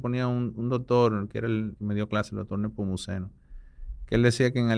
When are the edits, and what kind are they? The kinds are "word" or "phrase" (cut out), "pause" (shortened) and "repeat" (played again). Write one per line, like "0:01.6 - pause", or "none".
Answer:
0:01.7 - word